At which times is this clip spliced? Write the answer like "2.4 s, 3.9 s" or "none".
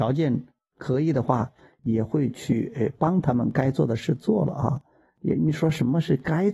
none